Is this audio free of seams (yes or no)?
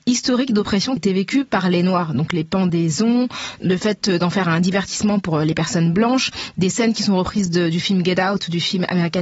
no